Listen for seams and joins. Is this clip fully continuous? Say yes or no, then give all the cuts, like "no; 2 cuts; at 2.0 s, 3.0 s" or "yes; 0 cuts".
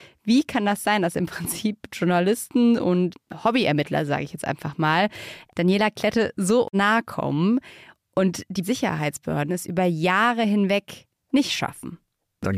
yes; 0 cuts